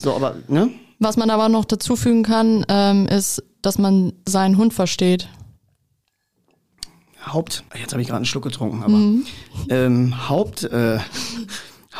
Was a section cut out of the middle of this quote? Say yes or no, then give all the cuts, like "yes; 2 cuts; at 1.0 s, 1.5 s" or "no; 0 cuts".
yes; 1 cut; at 7.7 s